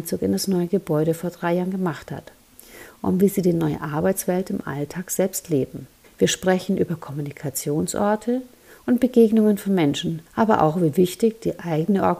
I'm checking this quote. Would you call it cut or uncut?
cut